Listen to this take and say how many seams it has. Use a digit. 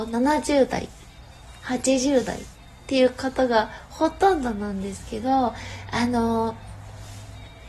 0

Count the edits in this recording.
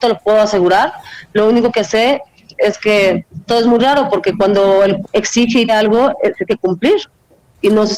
4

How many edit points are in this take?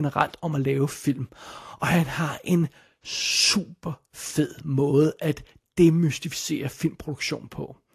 0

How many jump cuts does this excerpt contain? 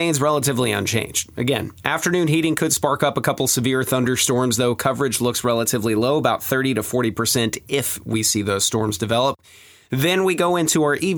0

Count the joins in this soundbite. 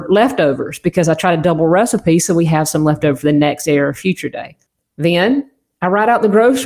0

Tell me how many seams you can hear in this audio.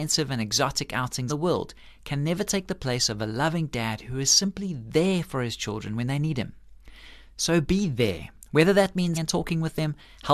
2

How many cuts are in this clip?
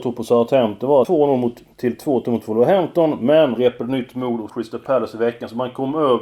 3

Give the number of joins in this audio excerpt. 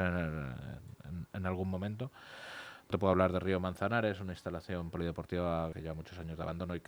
3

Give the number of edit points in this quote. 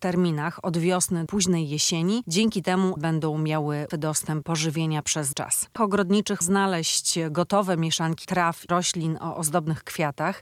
9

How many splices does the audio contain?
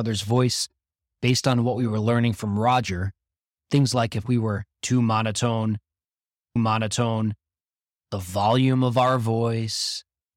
1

